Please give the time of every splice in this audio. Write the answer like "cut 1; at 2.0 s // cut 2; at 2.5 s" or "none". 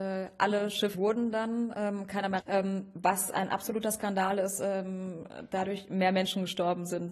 cut 1; at 0.9 s // cut 2; at 2.4 s